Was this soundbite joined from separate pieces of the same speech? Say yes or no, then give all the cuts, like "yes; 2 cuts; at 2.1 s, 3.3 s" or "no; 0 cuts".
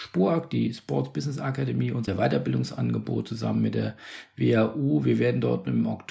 no; 0 cuts